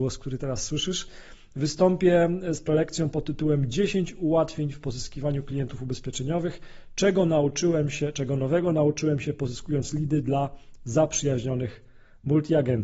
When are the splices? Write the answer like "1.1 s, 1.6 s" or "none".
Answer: none